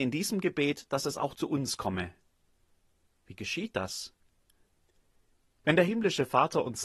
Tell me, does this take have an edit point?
no; 0 cuts

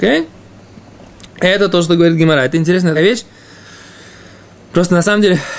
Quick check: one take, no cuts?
no; 1 cut; at 3.0 s

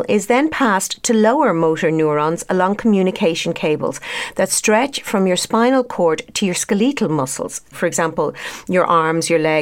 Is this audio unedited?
yes; 0 cuts

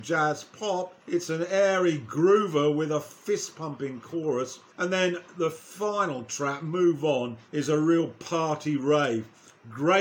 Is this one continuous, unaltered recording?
no; 3 cuts; at 1.0 s, 4.7 s, 7.5 s

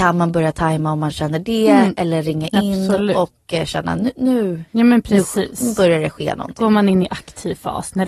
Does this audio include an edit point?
yes; 1 cut; at 4.7 s

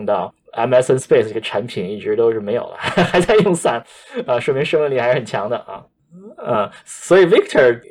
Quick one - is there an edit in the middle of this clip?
no; 0 cuts

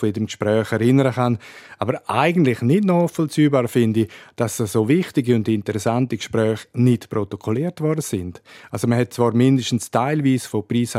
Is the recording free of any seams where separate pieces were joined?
yes; 0 cuts

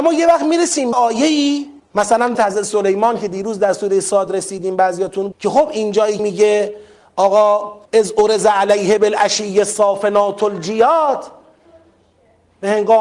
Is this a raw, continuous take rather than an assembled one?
no; 6 cuts; at 0.9 s, 1.8 s, 2.3 s, 5.3 s, 6.2 s, 7.9 s

